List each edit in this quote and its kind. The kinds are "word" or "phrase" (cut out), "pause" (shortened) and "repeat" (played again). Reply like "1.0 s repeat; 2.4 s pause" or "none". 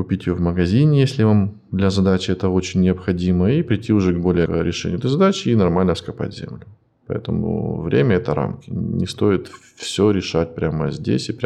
4.5 s phrase